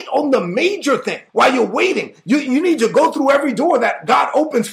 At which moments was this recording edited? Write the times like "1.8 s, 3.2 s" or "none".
1.3 s

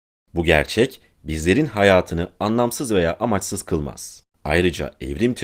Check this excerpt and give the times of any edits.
4.3 s

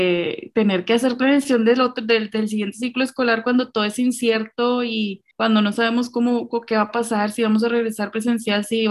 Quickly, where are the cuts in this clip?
5.3 s

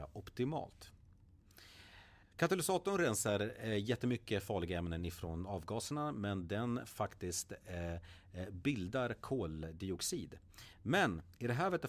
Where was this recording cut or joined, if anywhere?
2.2 s

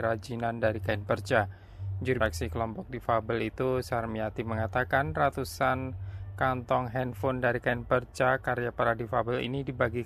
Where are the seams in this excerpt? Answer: 2.2 s

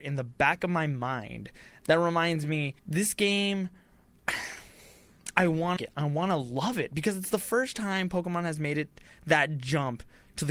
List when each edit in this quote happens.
2.8 s, 5.8 s

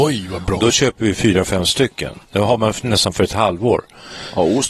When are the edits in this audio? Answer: 2.2 s

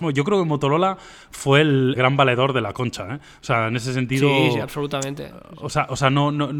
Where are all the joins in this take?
2.0 s

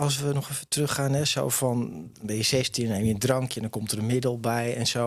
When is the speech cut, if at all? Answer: none

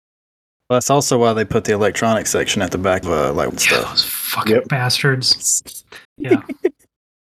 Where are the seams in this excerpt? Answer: 3.0 s, 3.5 s, 6.0 s

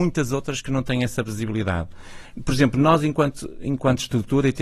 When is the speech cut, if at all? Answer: none

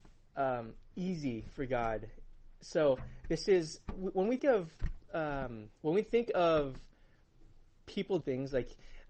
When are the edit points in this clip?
4.4 s, 5.8 s, 8.2 s

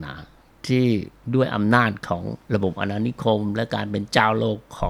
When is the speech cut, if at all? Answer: 2.4 s

